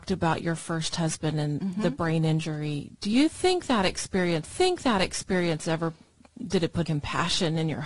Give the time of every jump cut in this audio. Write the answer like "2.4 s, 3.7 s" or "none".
4.4 s, 6.8 s